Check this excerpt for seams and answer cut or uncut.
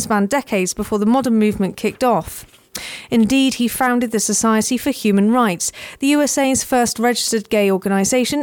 uncut